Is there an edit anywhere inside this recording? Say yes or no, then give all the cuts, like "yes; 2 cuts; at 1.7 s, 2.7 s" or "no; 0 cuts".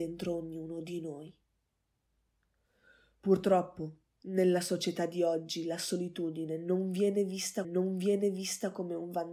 yes; 1 cut; at 7.6 s